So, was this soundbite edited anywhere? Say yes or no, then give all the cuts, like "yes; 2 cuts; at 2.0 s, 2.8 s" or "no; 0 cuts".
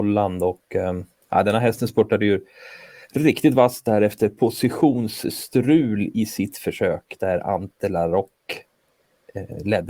no; 0 cuts